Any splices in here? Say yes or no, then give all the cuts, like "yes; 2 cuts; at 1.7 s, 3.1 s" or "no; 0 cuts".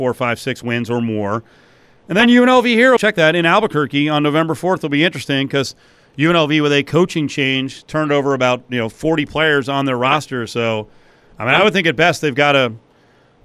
yes; 1 cut; at 3.0 s